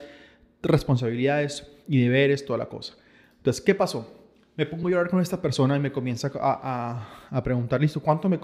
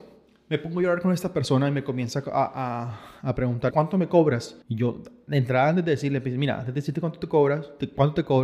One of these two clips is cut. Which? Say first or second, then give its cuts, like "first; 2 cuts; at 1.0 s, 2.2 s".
second; 2 cuts; at 3.7 s, 4.6 s